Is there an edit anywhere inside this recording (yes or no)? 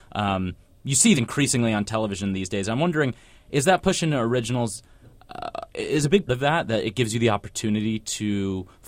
yes